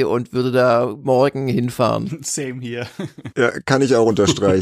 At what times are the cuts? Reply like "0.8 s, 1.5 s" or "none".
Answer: none